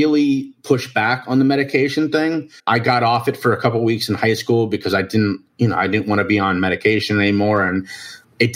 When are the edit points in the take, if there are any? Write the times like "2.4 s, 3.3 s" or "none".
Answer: 2.6 s